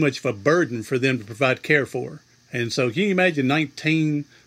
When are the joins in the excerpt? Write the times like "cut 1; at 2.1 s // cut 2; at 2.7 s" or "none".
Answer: none